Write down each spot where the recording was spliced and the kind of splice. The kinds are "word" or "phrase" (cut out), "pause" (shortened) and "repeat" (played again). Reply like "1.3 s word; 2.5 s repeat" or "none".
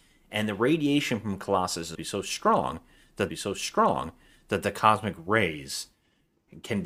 1.9 s word; 3.3 s repeat